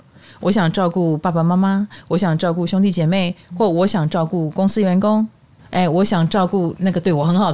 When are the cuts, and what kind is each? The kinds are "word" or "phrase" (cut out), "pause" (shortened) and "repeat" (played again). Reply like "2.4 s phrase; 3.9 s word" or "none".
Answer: none